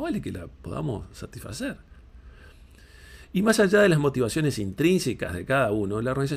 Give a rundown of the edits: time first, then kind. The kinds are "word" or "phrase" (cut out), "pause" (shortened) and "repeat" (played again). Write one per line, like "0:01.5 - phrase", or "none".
none